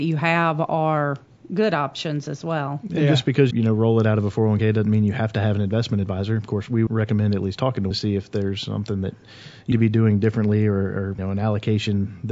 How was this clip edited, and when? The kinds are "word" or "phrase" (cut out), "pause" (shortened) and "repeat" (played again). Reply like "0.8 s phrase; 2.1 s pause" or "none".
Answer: 3.5 s word; 6.9 s word; 7.9 s word; 9.7 s word; 11.2 s word